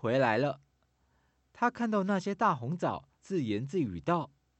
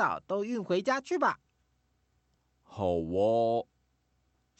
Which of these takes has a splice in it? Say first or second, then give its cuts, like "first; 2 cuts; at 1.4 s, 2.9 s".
first; 1 cut; at 3.1 s